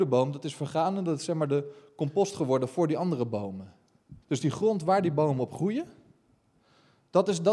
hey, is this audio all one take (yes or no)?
no